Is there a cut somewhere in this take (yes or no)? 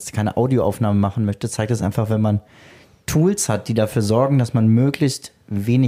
no